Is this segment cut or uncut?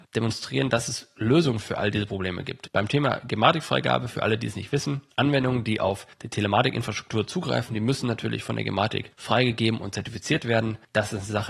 uncut